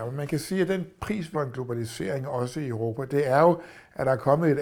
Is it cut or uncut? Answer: cut